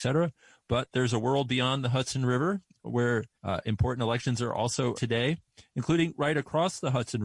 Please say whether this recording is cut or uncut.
cut